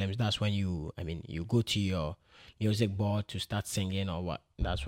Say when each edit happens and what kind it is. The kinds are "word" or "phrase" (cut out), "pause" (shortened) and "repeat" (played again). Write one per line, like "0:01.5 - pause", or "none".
none

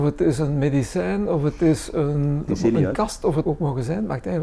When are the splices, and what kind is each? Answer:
0:02.5 - word
0:03.4 - word

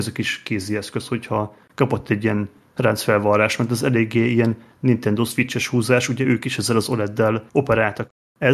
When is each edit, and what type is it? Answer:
none

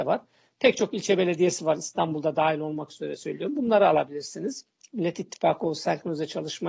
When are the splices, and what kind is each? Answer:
none

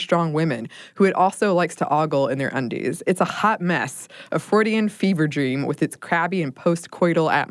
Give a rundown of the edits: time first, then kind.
none

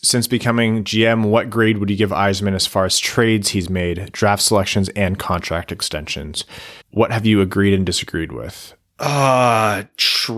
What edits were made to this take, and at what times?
0:06.8 - pause

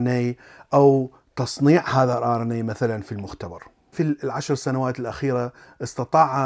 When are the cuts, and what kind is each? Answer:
none

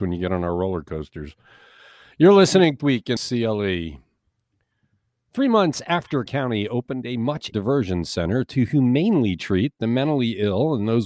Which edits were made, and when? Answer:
0:02.8 - word
0:03.2 - word
0:06.3 - word
0:07.5 - word

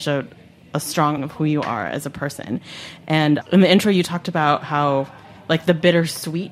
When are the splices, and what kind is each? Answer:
0:01.2 - word
0:03.4 - word

